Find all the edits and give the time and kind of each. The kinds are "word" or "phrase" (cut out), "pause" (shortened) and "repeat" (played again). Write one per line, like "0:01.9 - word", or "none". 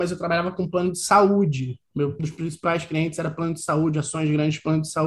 0:02.2 - word